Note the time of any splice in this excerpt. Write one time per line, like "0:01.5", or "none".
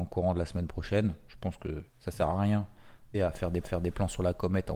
0:01.9
0:03.1
0:03.6